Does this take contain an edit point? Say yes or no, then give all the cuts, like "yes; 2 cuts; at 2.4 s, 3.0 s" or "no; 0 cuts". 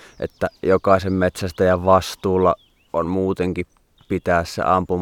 no; 0 cuts